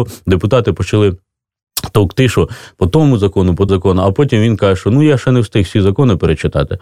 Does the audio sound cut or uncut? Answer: cut